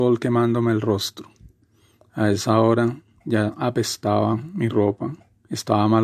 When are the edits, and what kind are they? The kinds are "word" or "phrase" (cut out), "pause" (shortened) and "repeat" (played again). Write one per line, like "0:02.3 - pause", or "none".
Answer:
none

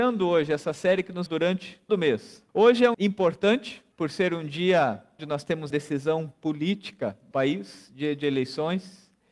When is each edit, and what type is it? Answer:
0:01.3 - word
0:01.9 - word
0:02.5 - pause
0:02.9 - word
0:03.9 - pause
0:05.2 - word
0:05.7 - word
0:07.3 - word

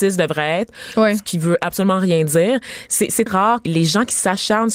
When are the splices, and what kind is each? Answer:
0:03.3 - word
0:03.7 - word

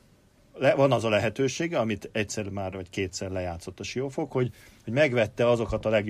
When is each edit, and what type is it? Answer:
none

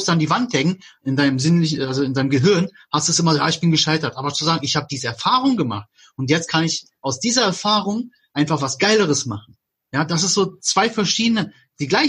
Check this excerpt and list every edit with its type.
none

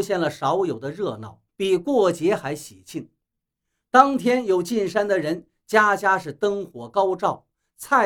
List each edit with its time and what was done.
0:01.5 - pause

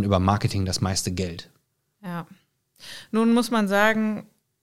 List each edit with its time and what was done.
none

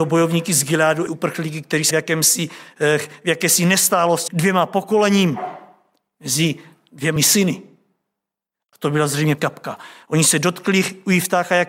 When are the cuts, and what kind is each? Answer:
0:01.1 - word
0:01.9 - word
0:04.3 - word
0:07.2 - word
0:09.4 - word

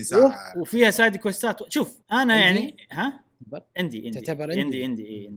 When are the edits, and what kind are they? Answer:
0:02.0 - pause

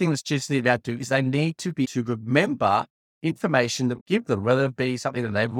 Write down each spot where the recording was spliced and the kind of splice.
0:01.8 - word
0:03.0 - pause
0:04.0 - word

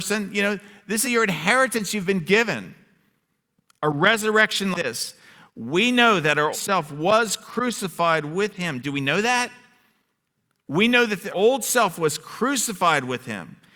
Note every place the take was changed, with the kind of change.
0:01.0 - word
0:04.7 - word
0:06.5 - word
0:11.3 - word

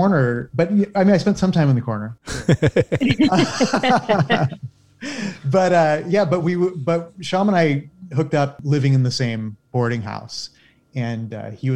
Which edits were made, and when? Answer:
none

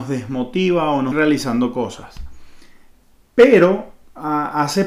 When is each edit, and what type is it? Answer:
0:01.1 - phrase

